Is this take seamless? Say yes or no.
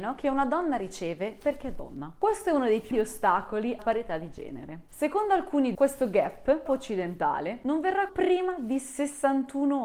no